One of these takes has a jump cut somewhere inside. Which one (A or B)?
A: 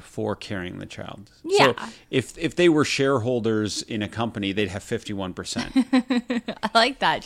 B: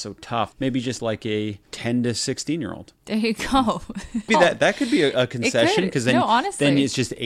B